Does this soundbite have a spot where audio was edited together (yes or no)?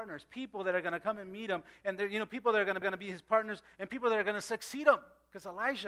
yes